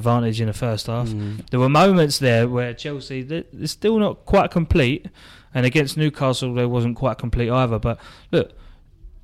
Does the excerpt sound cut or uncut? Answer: uncut